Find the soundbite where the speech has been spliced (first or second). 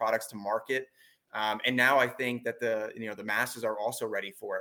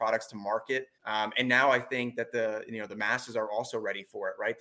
second